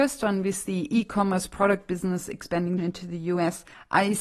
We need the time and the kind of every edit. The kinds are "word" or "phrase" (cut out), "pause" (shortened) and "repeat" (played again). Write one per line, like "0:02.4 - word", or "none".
0:02.8 - phrase